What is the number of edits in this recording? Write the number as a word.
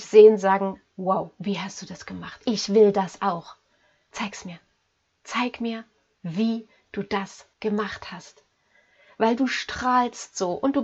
one